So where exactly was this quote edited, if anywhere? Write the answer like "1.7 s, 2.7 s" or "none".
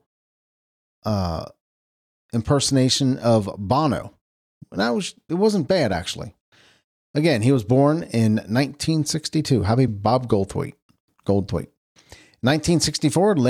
9.9 s